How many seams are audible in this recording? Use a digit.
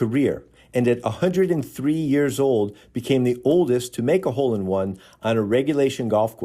0